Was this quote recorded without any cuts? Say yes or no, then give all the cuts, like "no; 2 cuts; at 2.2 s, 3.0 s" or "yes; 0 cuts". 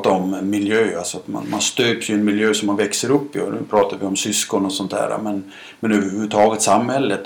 yes; 0 cuts